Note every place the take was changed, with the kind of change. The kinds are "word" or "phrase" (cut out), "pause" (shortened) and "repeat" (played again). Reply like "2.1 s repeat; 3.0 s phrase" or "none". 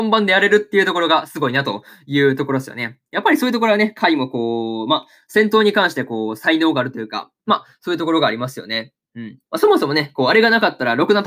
9.5 s pause